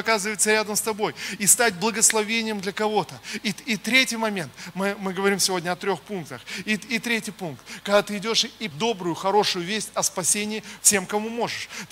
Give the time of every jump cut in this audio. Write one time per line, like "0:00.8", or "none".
0:08.7